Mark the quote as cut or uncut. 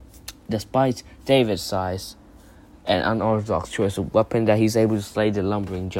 uncut